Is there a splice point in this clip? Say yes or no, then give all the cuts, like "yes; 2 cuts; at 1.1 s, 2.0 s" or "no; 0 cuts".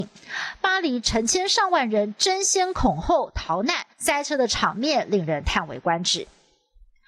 yes; 1 cut; at 3.9 s